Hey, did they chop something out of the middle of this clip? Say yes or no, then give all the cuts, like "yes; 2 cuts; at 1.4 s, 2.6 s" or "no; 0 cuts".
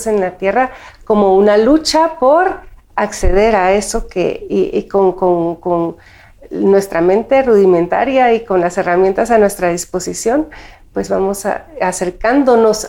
no; 0 cuts